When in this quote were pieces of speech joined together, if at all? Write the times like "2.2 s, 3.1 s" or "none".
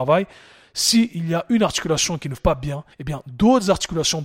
2.4 s, 2.9 s